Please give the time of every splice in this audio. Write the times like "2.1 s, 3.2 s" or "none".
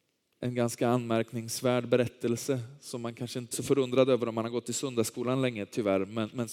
3.5 s